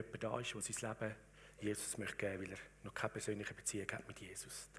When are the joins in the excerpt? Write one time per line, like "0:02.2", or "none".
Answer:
none

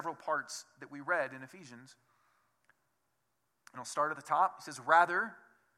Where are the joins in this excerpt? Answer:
none

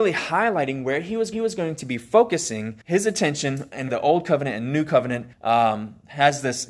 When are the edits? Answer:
0:01.3
0:02.8
0:03.9
0:05.3

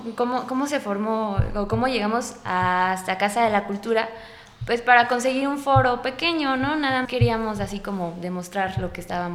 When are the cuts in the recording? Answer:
0:07.0

